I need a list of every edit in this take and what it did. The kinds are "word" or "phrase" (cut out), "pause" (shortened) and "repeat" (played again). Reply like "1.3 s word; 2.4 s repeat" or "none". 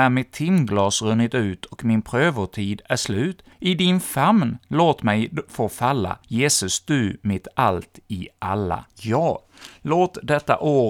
3.5 s pause; 6.2 s pause; 8.9 s pause